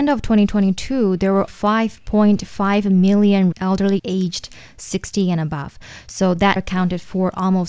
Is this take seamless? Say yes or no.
no